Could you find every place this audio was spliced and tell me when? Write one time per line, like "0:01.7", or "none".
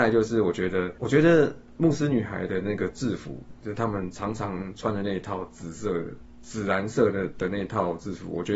0:01.0